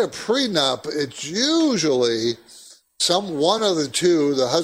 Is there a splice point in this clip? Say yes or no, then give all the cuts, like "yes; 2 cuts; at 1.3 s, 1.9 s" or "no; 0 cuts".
no; 0 cuts